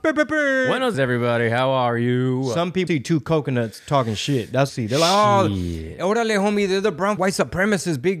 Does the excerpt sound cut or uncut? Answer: cut